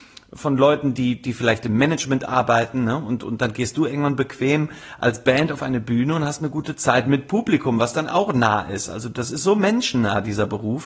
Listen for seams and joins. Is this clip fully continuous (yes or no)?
yes